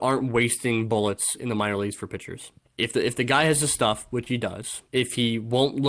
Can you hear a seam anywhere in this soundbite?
yes; 2 cuts; at 2.6 s, 4.9 s

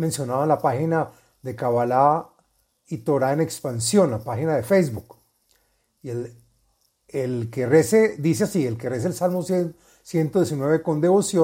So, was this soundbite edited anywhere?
no; 0 cuts

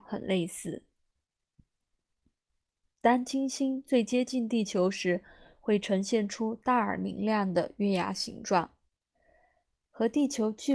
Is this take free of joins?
yes; 0 cuts

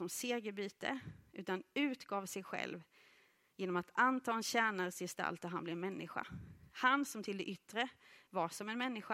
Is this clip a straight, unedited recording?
yes; 0 cuts

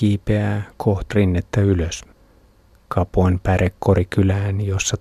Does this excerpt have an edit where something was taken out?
yes; 1 cut; at 1.1 s

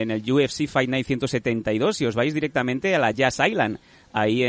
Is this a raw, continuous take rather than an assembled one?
yes; 0 cuts

